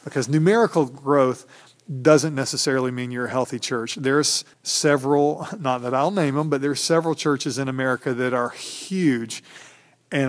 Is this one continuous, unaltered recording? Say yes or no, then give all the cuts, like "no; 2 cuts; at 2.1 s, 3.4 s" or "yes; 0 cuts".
no; 1 cut; at 4.5 s